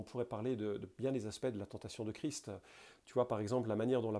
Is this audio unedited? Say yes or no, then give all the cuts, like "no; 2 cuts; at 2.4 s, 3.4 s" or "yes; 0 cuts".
yes; 0 cuts